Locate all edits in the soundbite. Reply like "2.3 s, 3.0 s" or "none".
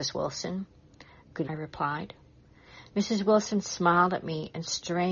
1.4 s